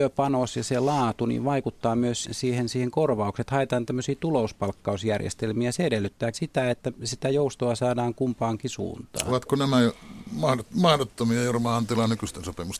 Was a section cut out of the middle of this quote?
yes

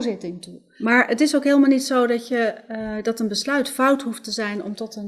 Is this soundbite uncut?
yes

